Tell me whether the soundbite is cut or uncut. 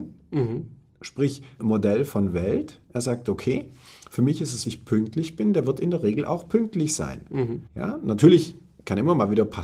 cut